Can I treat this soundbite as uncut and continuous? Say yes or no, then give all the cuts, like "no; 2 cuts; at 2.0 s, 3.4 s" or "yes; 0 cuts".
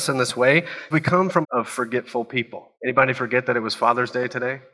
no; 3 cuts; at 0.9 s, 1.4 s, 2.7 s